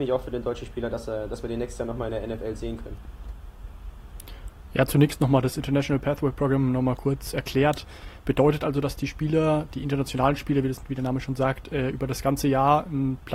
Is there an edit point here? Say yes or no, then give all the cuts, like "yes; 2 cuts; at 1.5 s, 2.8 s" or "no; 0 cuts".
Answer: no; 0 cuts